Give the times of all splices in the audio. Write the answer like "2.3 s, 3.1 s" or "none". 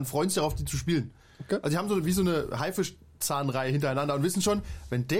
none